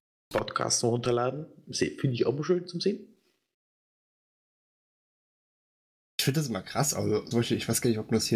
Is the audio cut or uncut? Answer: cut